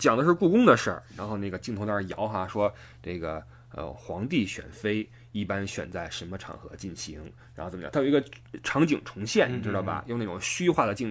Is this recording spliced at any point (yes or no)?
no